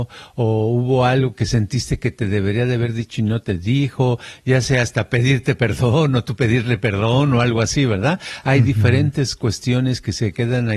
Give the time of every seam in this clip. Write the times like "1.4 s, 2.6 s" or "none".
none